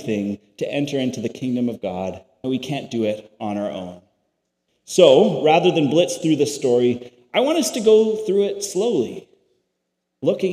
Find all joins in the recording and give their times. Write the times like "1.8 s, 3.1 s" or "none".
2.4 s

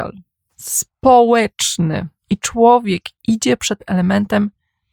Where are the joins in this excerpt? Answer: 2.2 s

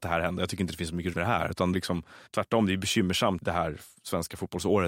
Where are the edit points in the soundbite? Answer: 1.1 s, 1.7 s, 2.3 s, 3.4 s

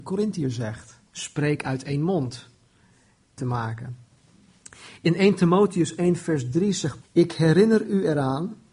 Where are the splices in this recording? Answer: 1.1 s, 3.4 s, 7.0 s

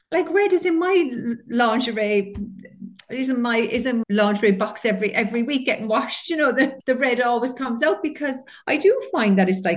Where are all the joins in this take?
4.0 s, 6.8 s

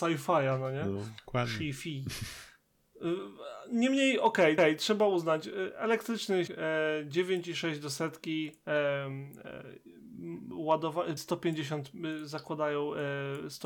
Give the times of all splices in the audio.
1.2 s, 4.6 s, 6.5 s, 11.2 s

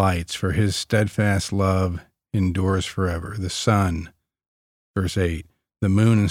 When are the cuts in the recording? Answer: none

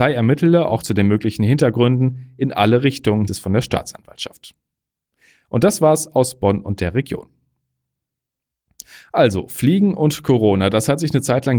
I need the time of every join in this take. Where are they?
3.3 s

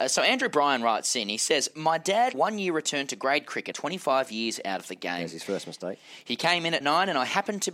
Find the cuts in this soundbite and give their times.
2.3 s, 3.7 s, 6.8 s

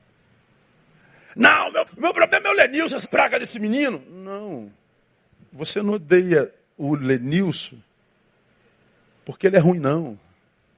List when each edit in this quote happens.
1.9 s, 3.0 s

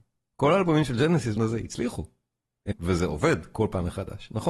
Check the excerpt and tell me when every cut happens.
1.4 s, 2.7 s

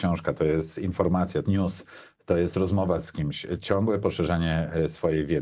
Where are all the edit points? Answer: 1.5 s

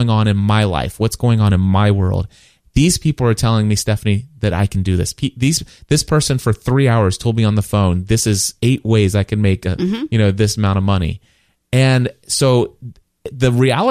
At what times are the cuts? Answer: none

